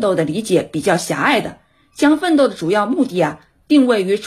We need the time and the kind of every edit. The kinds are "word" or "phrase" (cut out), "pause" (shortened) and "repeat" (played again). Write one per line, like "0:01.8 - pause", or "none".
none

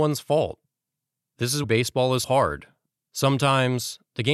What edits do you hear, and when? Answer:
0:01.6 - word
0:02.2 - word

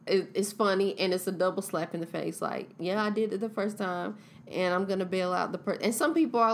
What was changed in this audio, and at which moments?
none

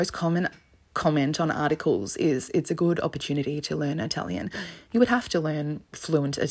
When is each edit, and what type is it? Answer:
none

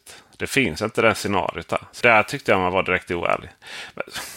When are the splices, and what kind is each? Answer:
0:02.0 - word

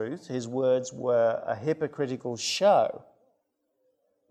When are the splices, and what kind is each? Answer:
none

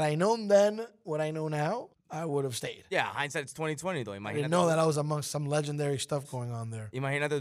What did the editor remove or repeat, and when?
0:01.9 - pause

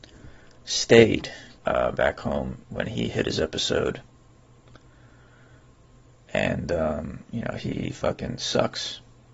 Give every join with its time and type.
0:01.6 - pause
0:02.6 - pause

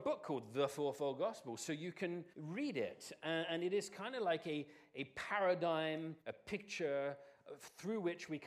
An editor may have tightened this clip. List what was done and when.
0:02.3 - pause
0:06.2 - pause

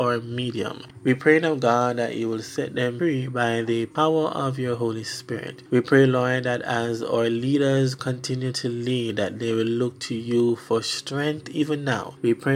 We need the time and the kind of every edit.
none

